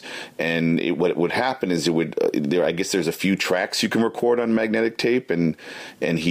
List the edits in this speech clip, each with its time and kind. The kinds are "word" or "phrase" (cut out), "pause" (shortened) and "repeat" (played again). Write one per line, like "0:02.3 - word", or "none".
none